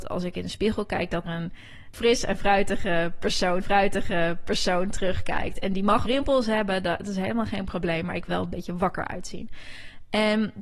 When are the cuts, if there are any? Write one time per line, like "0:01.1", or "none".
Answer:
0:01.2
0:03.6
0:06.0
0:08.3